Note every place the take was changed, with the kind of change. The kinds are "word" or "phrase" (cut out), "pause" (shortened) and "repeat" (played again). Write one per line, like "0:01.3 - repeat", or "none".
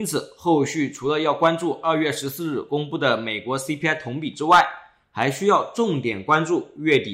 none